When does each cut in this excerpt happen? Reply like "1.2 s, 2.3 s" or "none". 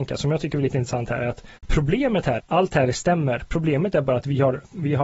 1.6 s, 2.4 s